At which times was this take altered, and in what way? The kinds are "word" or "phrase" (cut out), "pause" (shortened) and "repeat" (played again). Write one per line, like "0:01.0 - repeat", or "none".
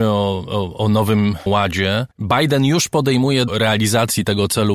0:01.5 - word
0:02.1 - pause
0:03.5 - phrase